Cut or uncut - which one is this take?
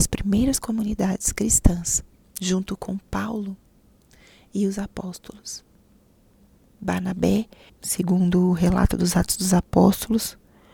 cut